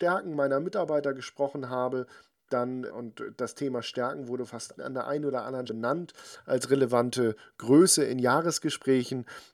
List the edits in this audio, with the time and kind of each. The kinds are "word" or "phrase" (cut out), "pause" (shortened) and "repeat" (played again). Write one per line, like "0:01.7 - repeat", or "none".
0:02.9 - word
0:04.5 - word
0:04.8 - word
0:05.7 - word